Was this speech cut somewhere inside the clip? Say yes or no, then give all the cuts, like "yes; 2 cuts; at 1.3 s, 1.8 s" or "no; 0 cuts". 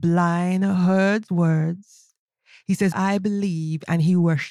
yes; 2 cuts; at 1.3 s, 2.9 s